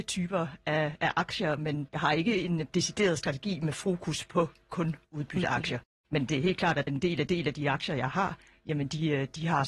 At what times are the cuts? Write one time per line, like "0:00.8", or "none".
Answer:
0:05.0
0:06.9
0:07.3